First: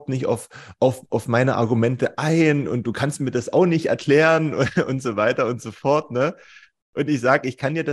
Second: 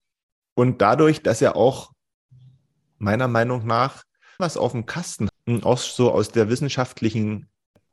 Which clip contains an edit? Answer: second; 2 cuts; at 4.4 s, 5.3 s

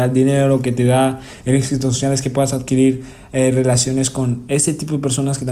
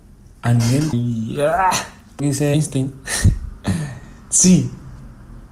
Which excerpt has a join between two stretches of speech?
second; 3 cuts; at 0.9 s, 2.2 s, 2.5 s

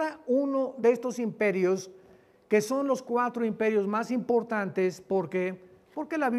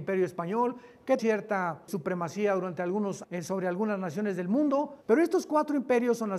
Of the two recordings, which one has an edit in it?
second; 4 cuts; at 1.2 s, 1.9 s, 3.2 s, 5.0 s

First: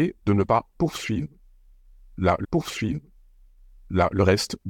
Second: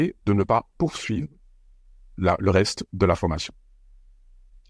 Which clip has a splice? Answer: first; 1 cut; at 2.4 s

